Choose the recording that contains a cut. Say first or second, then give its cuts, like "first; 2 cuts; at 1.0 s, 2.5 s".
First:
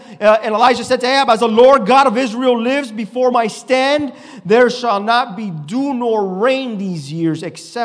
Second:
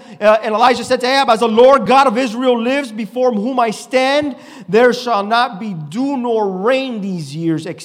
first; 1 cut; at 3.3 s